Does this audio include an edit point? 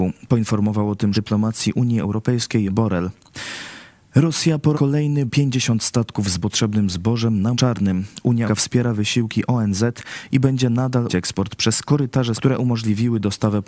yes; 9 cuts; at 1.1 s, 2.7 s, 4.7 s, 5.3 s, 6.4 s, 7.5 s, 8.5 s, 11.1 s, 12.3 s

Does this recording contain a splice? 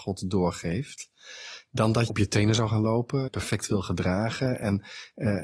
yes; 2 cuts; at 2.1 s, 3.3 s

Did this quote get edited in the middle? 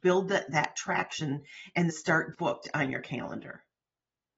yes; 2 cuts; at 1.9 s, 2.3 s

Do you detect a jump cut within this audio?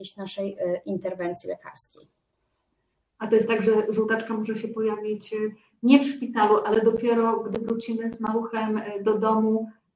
no; 0 cuts

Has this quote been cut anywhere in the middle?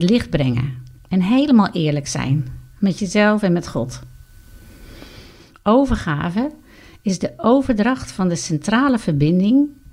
no; 0 cuts

